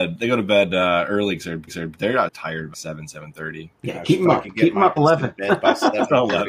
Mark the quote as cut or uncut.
cut